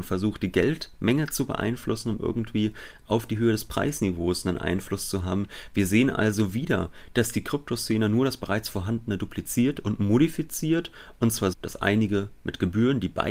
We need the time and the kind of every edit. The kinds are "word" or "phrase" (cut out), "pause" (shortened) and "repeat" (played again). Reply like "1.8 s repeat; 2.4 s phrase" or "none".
11.5 s word